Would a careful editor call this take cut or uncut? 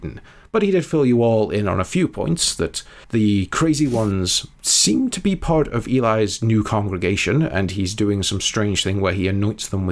cut